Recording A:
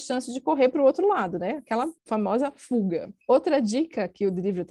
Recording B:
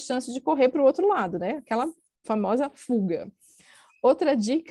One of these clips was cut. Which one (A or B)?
A